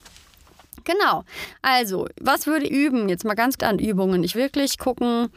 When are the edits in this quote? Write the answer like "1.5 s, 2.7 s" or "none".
2.7 s, 3.6 s, 4.3 s